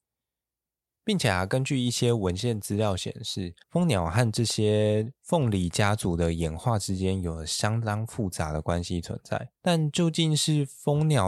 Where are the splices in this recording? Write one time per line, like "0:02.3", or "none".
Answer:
0:03.6
0:09.5